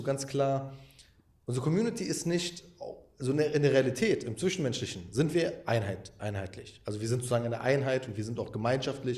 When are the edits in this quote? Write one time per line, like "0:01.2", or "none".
none